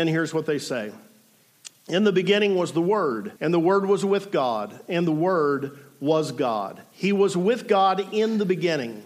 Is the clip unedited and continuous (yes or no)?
no